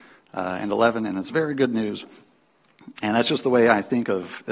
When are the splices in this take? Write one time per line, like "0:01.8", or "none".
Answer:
none